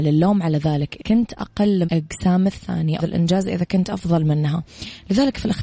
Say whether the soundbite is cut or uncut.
cut